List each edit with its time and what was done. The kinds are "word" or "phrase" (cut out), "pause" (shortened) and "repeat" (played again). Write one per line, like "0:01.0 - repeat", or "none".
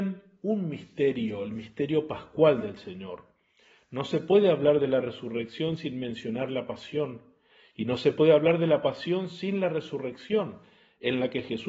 none